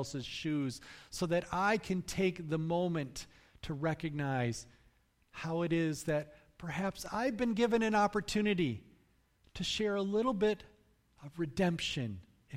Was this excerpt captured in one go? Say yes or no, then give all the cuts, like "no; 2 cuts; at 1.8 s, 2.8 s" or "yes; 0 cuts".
yes; 0 cuts